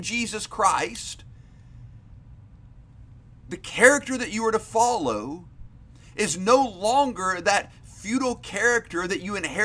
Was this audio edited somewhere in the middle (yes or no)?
no